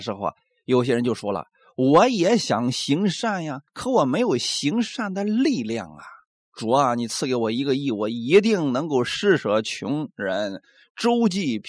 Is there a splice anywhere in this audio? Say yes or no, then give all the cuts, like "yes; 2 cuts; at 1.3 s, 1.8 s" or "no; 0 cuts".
yes; 1 cut; at 3.7 s